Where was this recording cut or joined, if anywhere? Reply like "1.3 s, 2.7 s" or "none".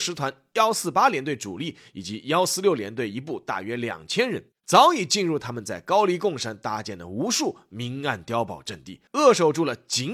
4.6 s, 9.1 s